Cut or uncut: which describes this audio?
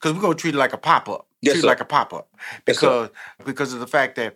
cut